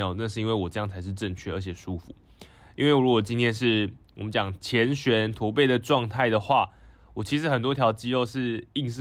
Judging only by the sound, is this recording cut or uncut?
uncut